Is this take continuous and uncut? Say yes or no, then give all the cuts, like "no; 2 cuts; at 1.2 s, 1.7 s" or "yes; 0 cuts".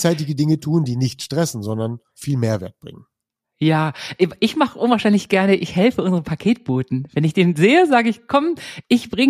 no; 1 cut; at 2.1 s